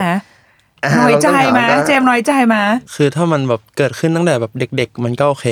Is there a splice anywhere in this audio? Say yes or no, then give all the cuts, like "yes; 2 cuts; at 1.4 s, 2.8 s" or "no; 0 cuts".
yes; 1 cut; at 2.8 s